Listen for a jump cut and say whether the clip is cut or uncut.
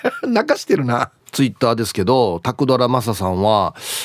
cut